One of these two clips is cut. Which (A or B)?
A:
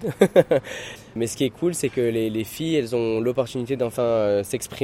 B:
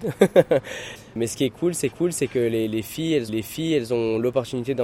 B